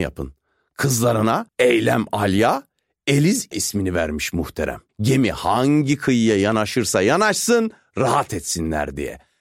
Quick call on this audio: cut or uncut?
cut